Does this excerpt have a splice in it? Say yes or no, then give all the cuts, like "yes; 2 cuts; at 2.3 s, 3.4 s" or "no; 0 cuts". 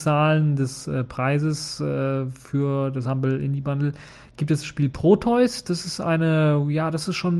no; 0 cuts